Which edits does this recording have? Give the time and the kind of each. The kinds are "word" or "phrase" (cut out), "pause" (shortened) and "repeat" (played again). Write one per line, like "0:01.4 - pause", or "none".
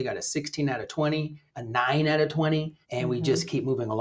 0:01.5 - pause
0:02.8 - pause